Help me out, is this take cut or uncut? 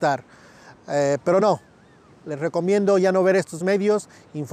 uncut